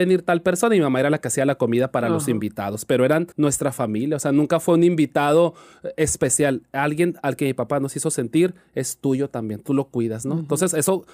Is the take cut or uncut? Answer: cut